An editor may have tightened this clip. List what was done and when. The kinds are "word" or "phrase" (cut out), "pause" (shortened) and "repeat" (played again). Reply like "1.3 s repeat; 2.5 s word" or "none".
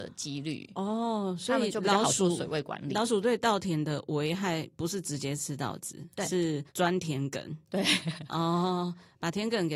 6.7 s pause